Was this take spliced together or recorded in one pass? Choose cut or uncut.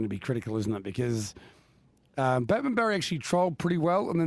uncut